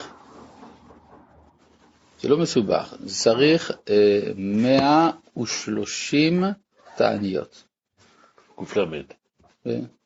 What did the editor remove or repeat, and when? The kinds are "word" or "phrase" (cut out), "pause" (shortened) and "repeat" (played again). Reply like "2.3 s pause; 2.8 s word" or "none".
none